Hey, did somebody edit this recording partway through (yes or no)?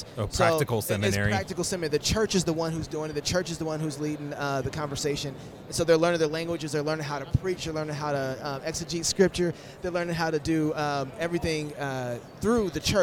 no